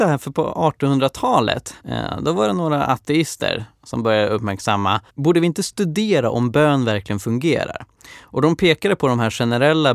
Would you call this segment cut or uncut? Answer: cut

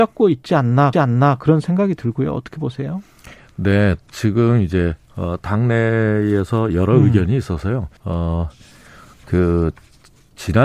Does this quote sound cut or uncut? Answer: cut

